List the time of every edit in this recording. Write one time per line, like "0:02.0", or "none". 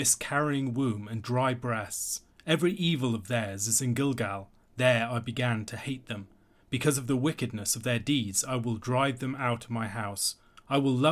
none